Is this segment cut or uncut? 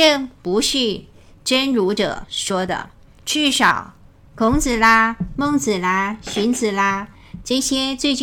uncut